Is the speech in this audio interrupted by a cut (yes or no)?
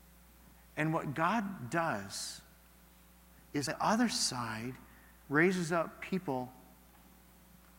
yes